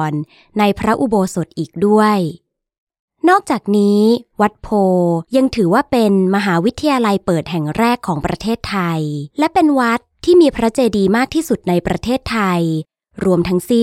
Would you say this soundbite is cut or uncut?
cut